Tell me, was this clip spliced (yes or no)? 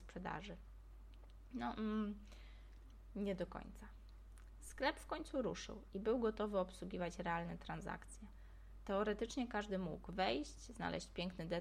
no